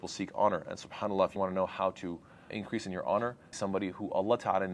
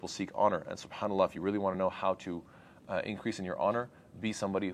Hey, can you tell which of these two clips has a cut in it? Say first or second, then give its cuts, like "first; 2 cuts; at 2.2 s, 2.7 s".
first; 3 cuts; at 1.4 s, 2.5 s, 3.5 s